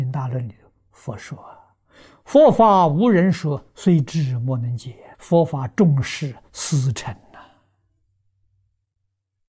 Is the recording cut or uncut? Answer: cut